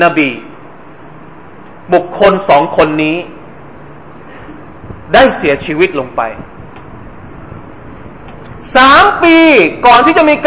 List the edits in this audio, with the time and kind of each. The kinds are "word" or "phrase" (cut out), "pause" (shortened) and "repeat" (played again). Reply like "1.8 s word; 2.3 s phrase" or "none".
5.0 s pause